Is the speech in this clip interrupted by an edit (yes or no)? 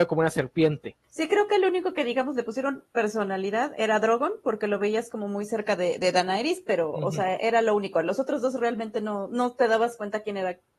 yes